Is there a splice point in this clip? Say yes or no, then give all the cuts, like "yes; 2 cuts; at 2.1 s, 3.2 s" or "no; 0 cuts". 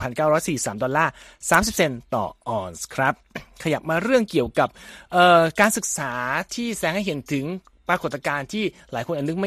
no; 0 cuts